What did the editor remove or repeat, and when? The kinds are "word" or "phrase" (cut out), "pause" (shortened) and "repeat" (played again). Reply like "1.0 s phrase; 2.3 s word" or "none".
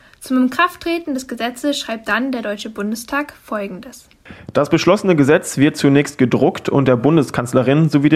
none